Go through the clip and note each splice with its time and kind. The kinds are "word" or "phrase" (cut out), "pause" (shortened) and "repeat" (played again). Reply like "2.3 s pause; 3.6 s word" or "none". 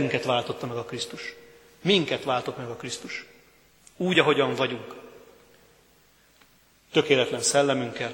none